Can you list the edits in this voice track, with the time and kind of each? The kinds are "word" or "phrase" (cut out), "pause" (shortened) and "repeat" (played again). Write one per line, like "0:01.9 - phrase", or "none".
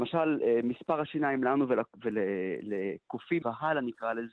0:03.4 - word